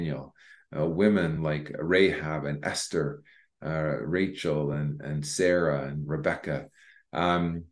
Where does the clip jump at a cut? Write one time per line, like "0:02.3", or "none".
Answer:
none